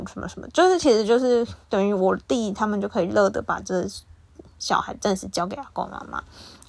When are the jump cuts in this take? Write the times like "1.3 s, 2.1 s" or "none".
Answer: 1.6 s